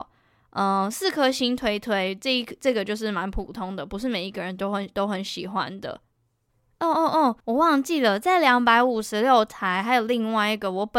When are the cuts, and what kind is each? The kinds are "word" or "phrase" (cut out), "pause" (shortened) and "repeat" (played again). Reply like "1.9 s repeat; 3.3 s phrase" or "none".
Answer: 7.4 s pause